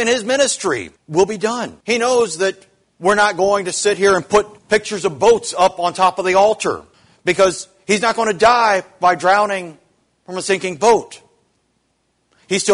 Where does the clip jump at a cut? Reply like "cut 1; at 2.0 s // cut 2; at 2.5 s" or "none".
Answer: cut 1; at 1.0 s // cut 2; at 1.8 s // cut 3; at 2.8 s // cut 4; at 4.6 s // cut 5; at 6.9 s